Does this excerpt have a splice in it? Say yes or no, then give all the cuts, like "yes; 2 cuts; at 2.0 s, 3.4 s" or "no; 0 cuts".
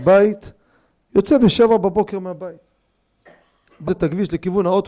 yes; 1 cut; at 3.9 s